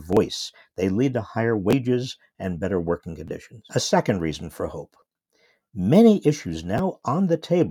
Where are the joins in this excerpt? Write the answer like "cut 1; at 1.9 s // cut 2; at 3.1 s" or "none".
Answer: cut 1; at 3.7 s

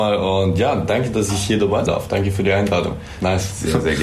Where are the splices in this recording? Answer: cut 1; at 1.9 s

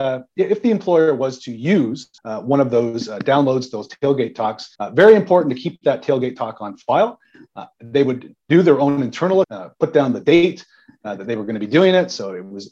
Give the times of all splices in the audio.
cut 1; at 2.2 s // cut 2; at 4.7 s // cut 3; at 9.4 s

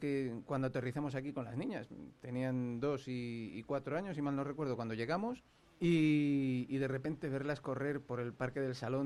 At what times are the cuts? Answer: cut 1; at 5.6 s

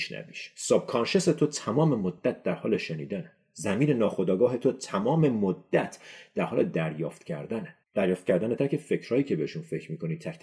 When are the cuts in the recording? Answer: cut 1; at 7.8 s // cut 2; at 8.6 s

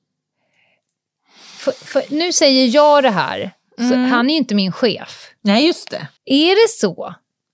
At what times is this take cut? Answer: cut 1; at 6.2 s

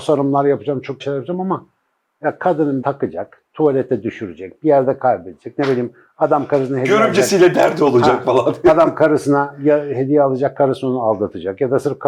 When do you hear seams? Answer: cut 1; at 1.0 s // cut 2; at 2.8 s

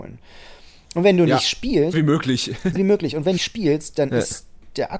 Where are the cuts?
cut 1; at 1.9 s // cut 2; at 2.8 s // cut 3; at 3.4 s

